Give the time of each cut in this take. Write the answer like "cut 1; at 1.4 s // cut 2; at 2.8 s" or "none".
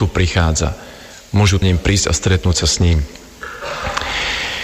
cut 1; at 1.6 s